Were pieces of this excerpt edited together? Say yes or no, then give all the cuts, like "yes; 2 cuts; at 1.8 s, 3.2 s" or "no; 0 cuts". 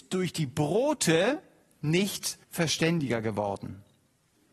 yes; 1 cut; at 2.4 s